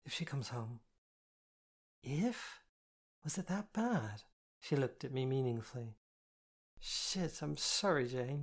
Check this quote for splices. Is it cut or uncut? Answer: cut